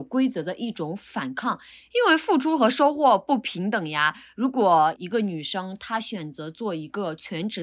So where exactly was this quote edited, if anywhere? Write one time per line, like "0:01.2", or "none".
none

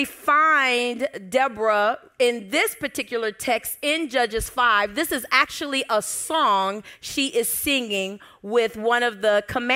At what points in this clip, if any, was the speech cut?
none

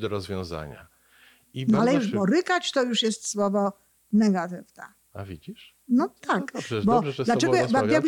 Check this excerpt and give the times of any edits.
none

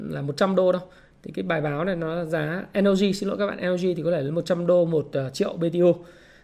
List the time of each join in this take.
none

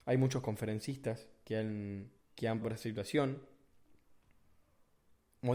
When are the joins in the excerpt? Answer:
0:02.2
0:02.6

